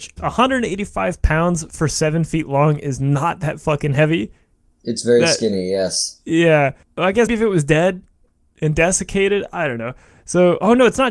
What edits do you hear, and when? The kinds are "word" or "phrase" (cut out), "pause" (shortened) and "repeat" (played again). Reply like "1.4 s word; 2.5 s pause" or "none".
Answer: 7.3 s word